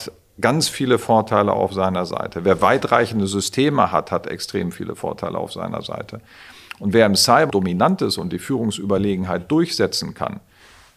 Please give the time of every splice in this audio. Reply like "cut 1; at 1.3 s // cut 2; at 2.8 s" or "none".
cut 1; at 7.5 s